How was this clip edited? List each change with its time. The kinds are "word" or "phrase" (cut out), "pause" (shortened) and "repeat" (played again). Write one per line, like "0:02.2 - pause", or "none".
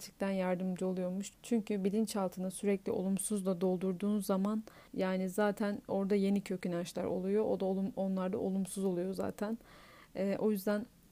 0:04.9 - pause